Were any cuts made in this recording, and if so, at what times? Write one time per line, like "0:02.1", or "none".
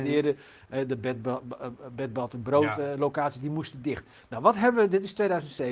none